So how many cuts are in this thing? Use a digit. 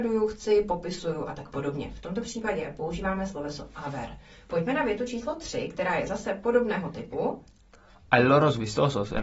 0